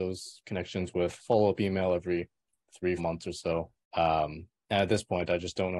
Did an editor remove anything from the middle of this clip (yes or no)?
yes